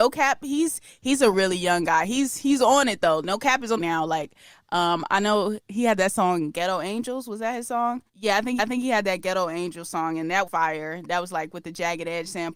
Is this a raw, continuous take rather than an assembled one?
no; 5 cuts; at 1.3 s, 3.8 s, 8.1 s, 8.6 s, 10.5 s

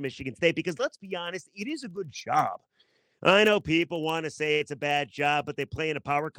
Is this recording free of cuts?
yes; 0 cuts

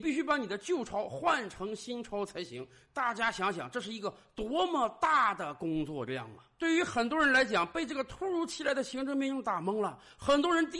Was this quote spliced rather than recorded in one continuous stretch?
no; 0 cuts

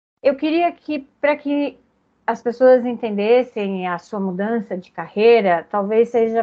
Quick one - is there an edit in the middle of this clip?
no; 0 cuts

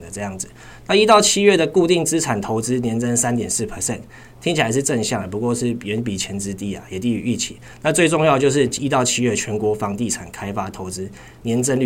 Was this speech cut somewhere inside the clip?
no; 0 cuts

